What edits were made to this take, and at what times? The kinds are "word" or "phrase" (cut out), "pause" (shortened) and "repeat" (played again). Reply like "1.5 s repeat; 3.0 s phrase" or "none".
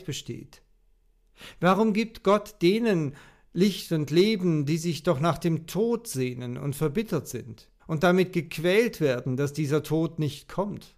7.8 s pause